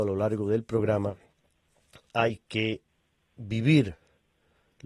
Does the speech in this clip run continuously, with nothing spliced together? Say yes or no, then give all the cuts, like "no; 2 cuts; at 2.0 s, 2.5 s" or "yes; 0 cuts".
yes; 0 cuts